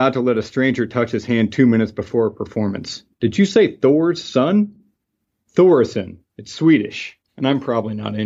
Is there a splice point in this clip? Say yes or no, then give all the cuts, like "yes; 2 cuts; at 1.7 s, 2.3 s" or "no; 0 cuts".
yes; 3 cuts; at 3.1 s, 6.3 s, 7.3 s